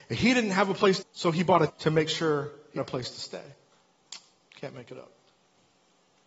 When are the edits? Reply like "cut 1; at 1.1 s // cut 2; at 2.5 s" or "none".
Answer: cut 1; at 1.0 s // cut 2; at 1.7 s // cut 3; at 2.8 s